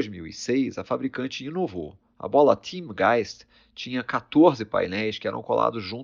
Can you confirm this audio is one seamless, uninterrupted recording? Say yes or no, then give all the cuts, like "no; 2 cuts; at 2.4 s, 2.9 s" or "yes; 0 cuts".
yes; 0 cuts